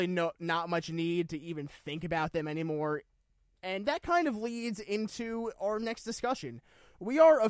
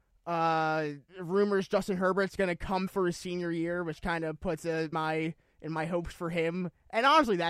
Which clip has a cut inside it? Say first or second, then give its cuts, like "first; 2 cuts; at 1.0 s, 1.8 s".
second; 3 cuts; at 1.1 s, 2.9 s, 4.9 s